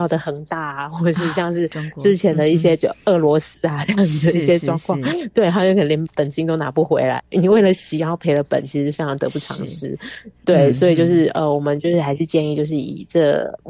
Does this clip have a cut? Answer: no; 0 cuts

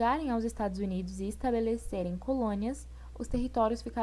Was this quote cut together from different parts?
no; 0 cuts

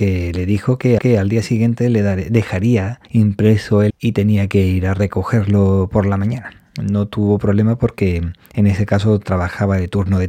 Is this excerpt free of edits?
no; 4 cuts; at 1.0 s, 3.1 s, 3.9 s, 6.6 s

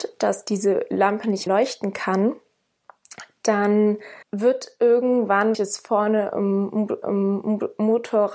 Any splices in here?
yes; 4 cuts; at 1.5 s, 4.2 s, 5.5 s, 7.0 s

